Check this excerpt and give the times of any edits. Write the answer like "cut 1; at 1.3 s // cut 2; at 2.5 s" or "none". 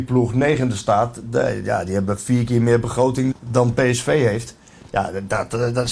cut 1; at 3.3 s